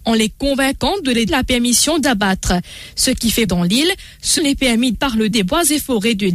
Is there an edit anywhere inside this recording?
yes; 6 cuts; at 1.3 s, 2.0 s, 3.5 s, 4.4 s, 4.9 s, 5.3 s

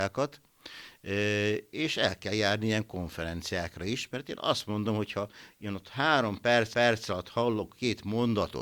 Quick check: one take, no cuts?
no; 1 cut; at 6.7 s

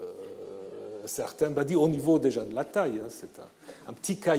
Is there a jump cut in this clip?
no; 0 cuts

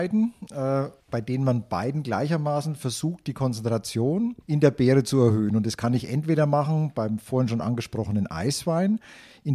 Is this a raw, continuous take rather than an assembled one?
no; 2 cuts; at 1.0 s, 4.4 s

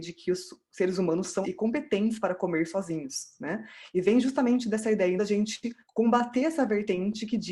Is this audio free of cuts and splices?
no; 3 cuts; at 1.4 s, 5.2 s, 5.8 s

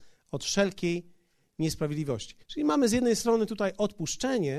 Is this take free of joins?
no; 1 cut; at 2.4 s

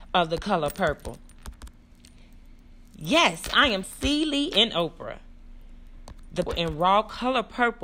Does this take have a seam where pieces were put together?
yes; 3 cuts; at 2.9 s, 3.8 s, 6.5 s

